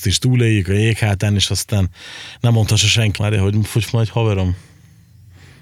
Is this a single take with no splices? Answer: no; 2 cuts; at 3.2 s, 3.8 s

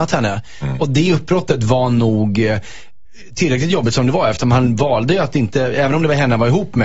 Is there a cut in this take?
no; 0 cuts

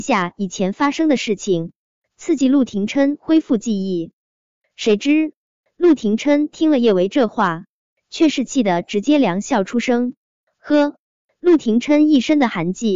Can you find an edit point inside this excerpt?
no; 0 cuts

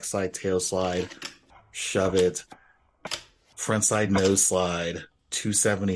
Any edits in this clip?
no; 0 cuts

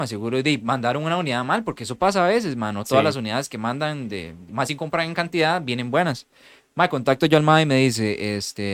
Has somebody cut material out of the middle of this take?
no; 0 cuts

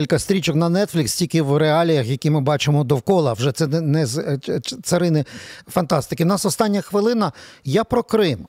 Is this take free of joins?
yes; 0 cuts

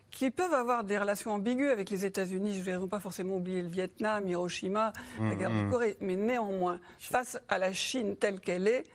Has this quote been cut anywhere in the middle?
no; 0 cuts

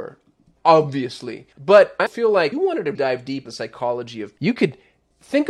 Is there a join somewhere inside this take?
yes; 6 cuts; at 1.5 s, 2.1 s, 2.5 s, 3.0 s, 3.5 s, 4.4 s

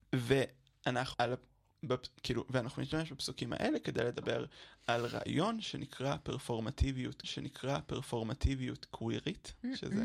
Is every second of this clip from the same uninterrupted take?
no; 2 cuts; at 1.1 s, 7.2 s

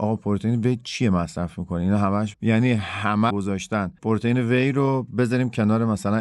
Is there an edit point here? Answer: yes; 2 cuts; at 2.3 s, 3.3 s

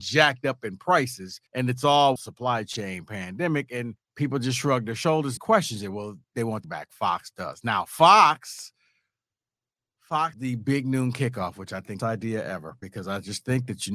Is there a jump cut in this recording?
yes; 8 cuts; at 1.5 s, 2.2 s, 4.0 s, 5.4 s, 6.2 s, 6.6 s, 10.3 s, 12.0 s

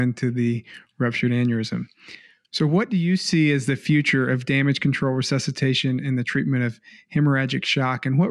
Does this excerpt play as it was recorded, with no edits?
yes; 0 cuts

